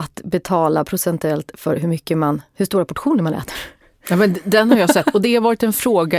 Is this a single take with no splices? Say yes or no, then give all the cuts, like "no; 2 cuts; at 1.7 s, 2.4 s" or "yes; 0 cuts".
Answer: yes; 0 cuts